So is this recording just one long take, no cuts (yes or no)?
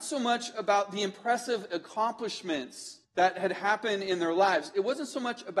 no